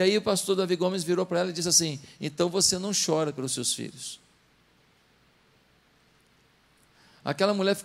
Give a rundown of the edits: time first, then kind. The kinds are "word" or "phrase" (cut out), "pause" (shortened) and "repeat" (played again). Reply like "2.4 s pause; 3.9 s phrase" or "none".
none